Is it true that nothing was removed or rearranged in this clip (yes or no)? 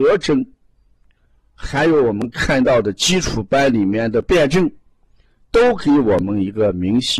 yes